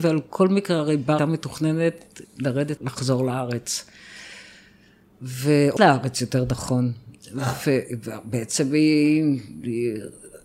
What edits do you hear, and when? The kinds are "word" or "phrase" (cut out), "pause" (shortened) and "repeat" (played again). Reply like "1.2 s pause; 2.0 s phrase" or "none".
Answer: 1.2 s word; 2.2 s word; 2.8 s word; 5.8 s word

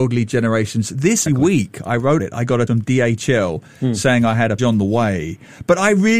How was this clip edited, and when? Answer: 1.3 s word; 2.2 s word; 2.7 s word; 4.6 s word

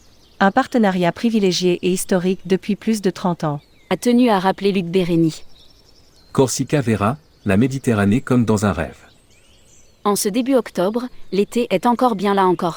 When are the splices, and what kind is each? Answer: none

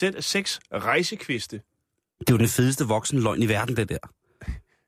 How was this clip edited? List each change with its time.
none

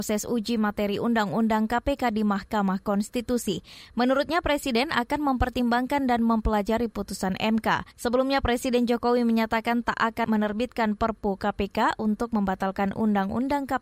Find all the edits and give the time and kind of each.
7.9 s pause

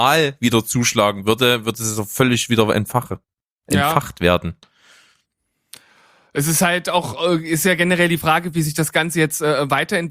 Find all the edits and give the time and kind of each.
none

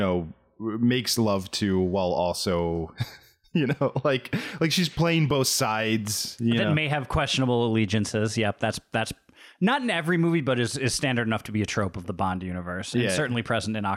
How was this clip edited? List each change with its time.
none

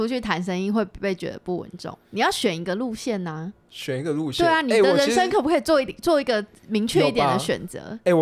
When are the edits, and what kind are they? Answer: 2.0 s pause; 3.6 s pause

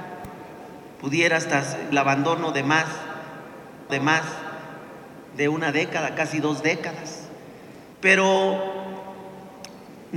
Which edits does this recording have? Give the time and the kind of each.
1.9 s phrase; 3.9 s repeat; 7.9 s pause

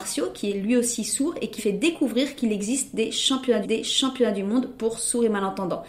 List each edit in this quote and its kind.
1.6 s word; 3.6 s repeat

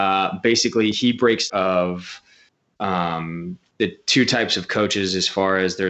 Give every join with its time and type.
1.5 s phrase

